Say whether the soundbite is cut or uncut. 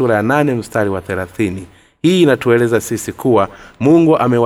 uncut